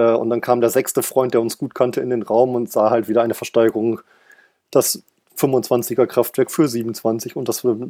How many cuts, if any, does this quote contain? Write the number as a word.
zero